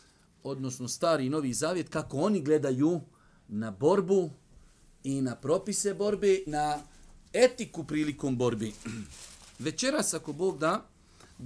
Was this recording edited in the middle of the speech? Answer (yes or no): yes